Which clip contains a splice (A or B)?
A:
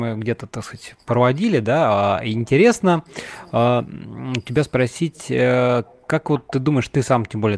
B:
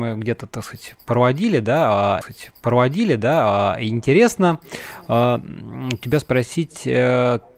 B